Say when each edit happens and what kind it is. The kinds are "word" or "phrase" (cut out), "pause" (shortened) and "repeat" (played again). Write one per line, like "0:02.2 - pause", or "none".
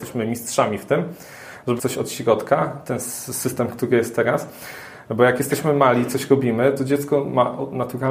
0:01.8 - word

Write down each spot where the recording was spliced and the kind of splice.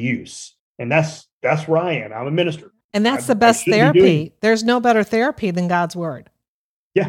0:01.3 - pause
0:02.8 - pause

